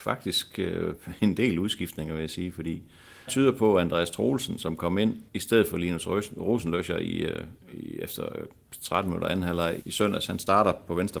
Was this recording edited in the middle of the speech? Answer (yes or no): yes